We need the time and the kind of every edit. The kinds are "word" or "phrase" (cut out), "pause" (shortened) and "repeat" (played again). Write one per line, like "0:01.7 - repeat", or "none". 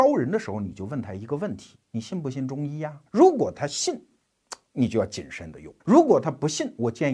0:03.1 - pause
0:05.8 - pause